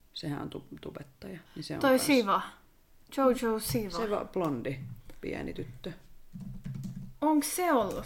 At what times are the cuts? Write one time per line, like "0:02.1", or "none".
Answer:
0:01.5